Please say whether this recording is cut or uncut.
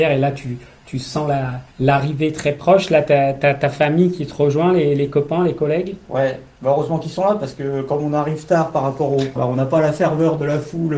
cut